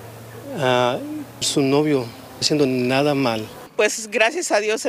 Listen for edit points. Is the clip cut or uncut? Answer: cut